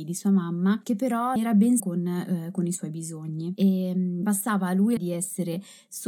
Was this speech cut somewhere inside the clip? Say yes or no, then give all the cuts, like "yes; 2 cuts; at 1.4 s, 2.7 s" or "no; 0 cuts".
yes; 3 cuts; at 1.4 s, 1.8 s, 5.0 s